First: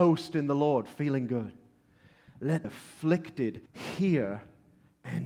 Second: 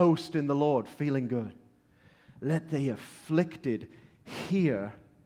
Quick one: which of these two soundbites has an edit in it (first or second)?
first